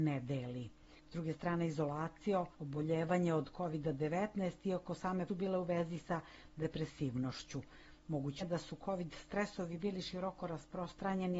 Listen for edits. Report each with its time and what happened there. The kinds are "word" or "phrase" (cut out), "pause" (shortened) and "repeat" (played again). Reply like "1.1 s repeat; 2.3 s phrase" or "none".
2.5 s pause; 5.3 s phrase; 8.4 s word